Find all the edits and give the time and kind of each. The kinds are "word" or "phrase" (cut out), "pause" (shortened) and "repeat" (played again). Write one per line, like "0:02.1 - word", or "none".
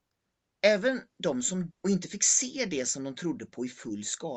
0:01.7 - word